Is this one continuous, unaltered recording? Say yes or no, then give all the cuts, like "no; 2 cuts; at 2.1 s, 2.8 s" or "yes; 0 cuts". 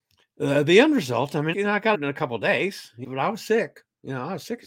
no; 3 cuts; at 1.5 s, 1.9 s, 3.0 s